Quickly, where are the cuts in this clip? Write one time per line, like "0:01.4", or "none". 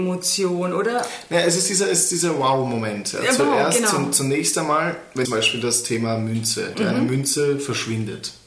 0:05.2
0:06.7